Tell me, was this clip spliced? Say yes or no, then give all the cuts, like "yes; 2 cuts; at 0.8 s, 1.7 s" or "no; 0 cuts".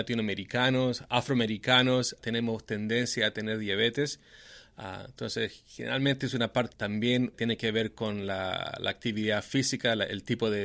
yes; 3 cuts; at 2.2 s, 6.7 s, 7.3 s